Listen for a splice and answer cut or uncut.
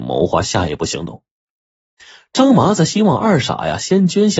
uncut